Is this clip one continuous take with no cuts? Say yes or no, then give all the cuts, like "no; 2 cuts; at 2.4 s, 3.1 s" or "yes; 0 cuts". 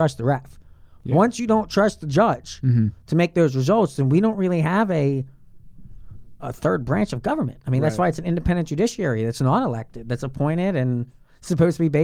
yes; 0 cuts